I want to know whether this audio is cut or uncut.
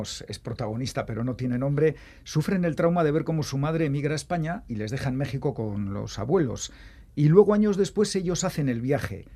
uncut